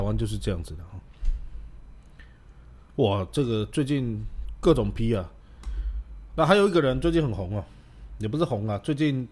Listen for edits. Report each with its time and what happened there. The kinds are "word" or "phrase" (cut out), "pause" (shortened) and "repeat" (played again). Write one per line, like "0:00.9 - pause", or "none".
0:06.3 - word